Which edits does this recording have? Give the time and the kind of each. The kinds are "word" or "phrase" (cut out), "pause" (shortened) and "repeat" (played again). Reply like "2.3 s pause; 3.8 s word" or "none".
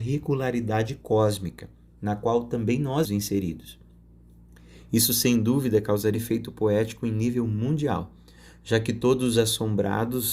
3.0 s word; 6.1 s word